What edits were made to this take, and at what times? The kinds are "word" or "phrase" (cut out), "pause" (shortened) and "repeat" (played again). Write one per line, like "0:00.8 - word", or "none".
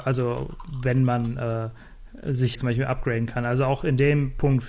0:02.5 - phrase